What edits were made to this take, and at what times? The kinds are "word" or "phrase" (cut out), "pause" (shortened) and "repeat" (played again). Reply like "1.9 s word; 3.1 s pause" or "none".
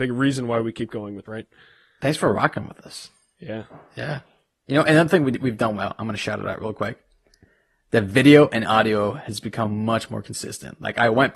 1.3 s word